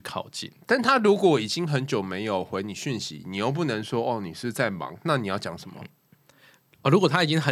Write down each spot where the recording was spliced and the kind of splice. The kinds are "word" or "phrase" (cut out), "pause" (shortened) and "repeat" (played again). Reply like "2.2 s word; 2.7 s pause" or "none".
none